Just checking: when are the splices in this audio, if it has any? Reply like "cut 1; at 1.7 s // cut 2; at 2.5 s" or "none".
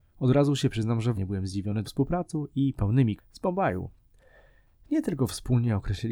cut 1; at 1.1 s // cut 2; at 1.8 s // cut 3; at 3.2 s